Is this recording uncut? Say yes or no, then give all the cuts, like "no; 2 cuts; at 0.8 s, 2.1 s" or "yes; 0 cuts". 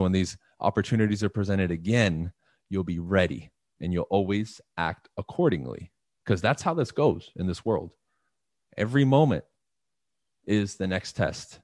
yes; 0 cuts